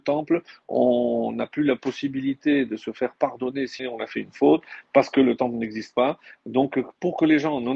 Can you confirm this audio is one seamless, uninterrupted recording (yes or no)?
no